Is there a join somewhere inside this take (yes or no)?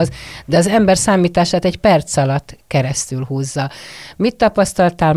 no